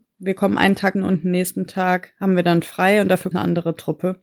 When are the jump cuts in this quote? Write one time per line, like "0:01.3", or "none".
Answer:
0:00.9
0:03.3